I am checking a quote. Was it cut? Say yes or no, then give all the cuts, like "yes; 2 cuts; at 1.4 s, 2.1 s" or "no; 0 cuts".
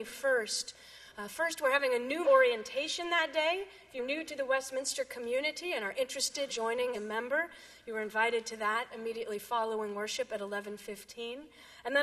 yes; 4 cuts; at 2.2 s, 4.0 s, 6.5 s, 6.9 s